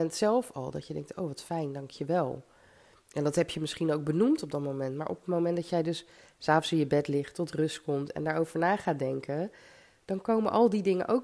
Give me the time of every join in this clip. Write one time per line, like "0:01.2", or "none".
none